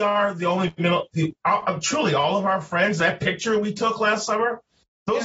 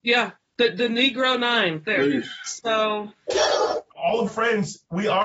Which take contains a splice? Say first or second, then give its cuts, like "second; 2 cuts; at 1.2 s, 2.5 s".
second; 2 cuts; at 1.8 s, 4.3 s